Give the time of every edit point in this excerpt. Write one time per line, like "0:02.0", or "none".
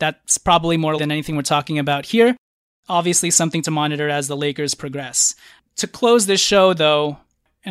0:01.0

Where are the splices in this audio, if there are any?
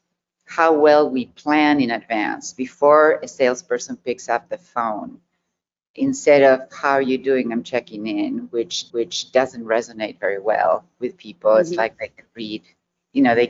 0:08.9

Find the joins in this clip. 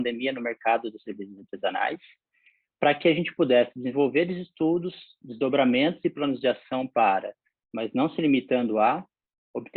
none

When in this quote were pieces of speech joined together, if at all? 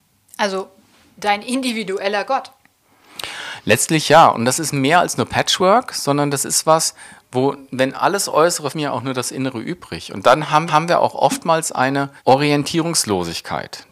0:08.7
0:10.7
0:12.2

